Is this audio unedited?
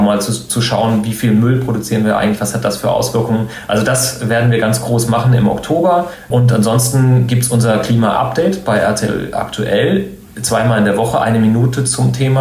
yes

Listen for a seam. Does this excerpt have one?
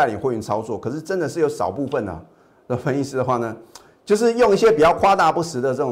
no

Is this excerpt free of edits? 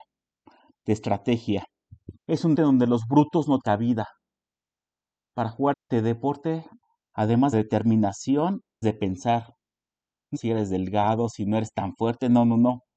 no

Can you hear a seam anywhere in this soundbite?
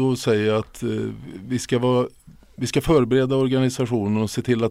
no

